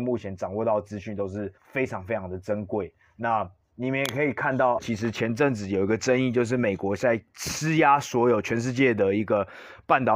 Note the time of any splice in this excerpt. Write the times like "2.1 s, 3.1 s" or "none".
1.6 s, 4.8 s